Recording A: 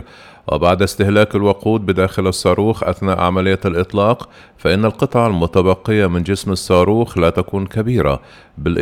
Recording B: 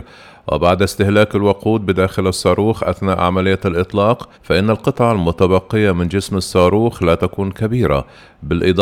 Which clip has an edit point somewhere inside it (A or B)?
B